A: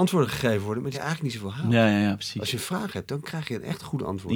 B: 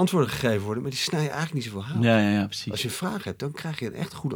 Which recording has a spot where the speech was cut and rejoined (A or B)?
A